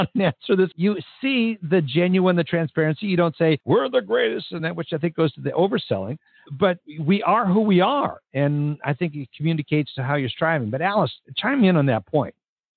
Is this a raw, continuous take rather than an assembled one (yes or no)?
yes